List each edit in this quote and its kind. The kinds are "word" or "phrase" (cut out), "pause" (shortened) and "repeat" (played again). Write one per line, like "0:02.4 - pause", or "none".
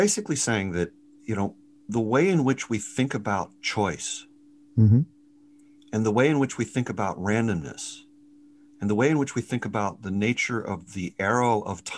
0:01.9 - word